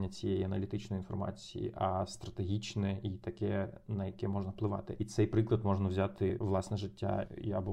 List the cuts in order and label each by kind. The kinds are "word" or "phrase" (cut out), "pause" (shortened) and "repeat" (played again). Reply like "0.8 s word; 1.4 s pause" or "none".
none